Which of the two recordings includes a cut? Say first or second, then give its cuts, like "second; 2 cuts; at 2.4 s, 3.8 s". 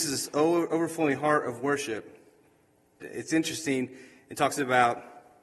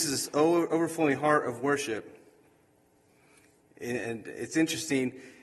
first; 1 cut; at 3.0 s